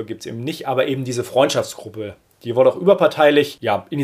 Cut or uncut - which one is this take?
uncut